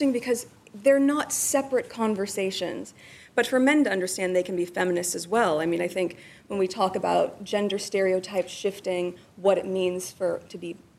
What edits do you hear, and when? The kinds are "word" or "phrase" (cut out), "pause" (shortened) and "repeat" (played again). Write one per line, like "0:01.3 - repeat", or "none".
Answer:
none